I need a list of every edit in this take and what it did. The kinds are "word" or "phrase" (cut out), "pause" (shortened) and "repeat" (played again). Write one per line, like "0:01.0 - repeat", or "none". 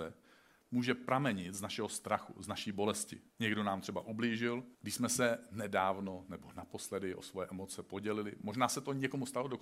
0:03.3 - pause
0:04.7 - pause